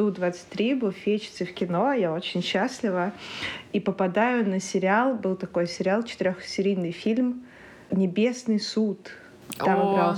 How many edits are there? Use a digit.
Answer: 0